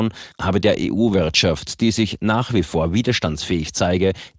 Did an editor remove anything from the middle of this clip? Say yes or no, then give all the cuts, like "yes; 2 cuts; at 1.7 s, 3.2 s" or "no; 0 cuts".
no; 0 cuts